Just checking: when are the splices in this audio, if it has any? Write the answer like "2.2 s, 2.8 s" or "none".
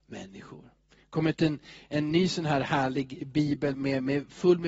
3.7 s